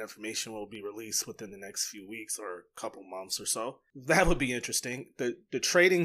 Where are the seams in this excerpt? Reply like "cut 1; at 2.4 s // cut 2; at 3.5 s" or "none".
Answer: none